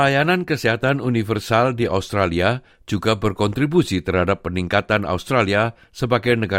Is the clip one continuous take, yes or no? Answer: yes